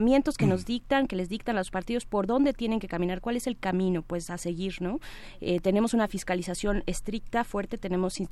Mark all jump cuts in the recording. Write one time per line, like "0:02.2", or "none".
none